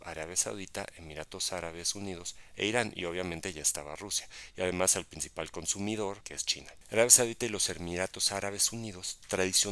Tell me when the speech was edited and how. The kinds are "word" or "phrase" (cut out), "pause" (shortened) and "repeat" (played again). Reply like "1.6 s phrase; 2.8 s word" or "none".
none